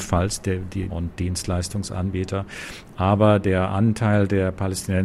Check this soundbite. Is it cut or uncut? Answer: cut